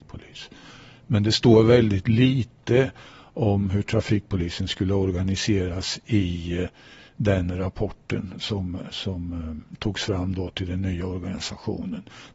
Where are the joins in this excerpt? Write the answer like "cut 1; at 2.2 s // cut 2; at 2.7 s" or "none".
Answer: none